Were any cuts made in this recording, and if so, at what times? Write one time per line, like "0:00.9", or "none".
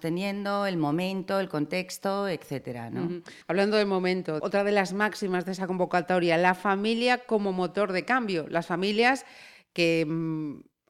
0:03.4
0:04.4